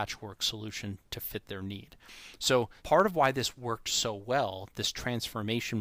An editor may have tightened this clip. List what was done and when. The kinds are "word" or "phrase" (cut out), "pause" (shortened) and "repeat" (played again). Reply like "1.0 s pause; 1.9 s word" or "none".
2.8 s pause